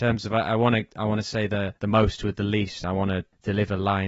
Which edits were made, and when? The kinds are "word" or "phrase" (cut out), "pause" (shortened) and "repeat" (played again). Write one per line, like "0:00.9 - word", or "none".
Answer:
0:01.8 - pause

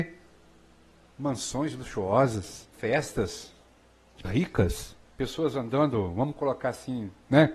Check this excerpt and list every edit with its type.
0:02.7 - pause
0:04.2 - word
0:05.1 - pause

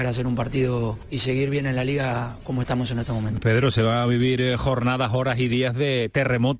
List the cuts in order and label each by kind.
0:01.0 - word

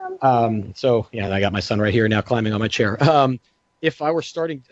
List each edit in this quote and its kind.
none

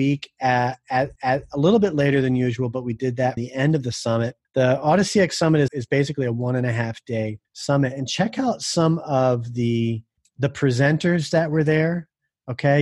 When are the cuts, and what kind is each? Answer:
0:01.2 - repeat
0:03.4 - word
0:04.4 - pause
0:05.7 - word
0:07.4 - pause
0:10.2 - word

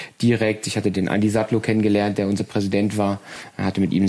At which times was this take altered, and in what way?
0:00.9 - word
0:02.4 - word

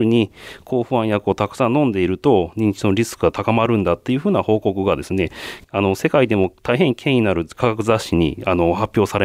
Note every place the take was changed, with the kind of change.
0:05.6 - pause

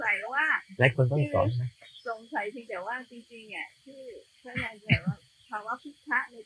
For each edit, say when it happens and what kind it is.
none

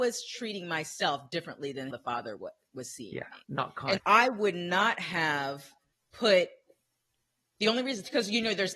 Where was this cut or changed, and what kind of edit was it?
0:01.9 - word
0:03.4 - pause
0:04.0 - word
0:05.9 - pause

